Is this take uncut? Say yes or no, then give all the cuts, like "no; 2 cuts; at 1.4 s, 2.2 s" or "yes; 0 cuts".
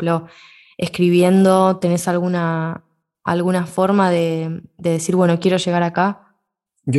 yes; 0 cuts